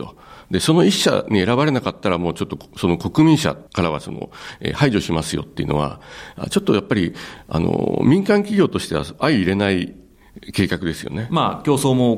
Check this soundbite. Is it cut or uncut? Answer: cut